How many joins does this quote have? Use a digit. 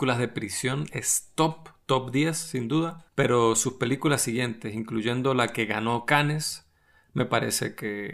1